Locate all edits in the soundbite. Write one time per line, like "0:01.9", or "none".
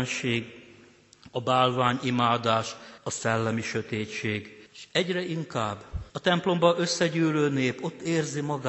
0:03.0
0:04.7
0:06.1